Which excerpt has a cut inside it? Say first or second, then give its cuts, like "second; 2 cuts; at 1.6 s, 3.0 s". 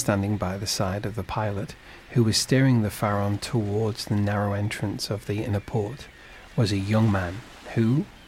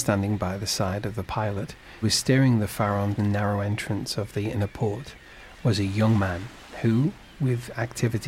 second; 2 cuts; at 2.0 s, 3.2 s